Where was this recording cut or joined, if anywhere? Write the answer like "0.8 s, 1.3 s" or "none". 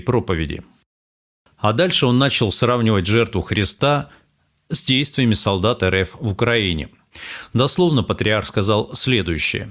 none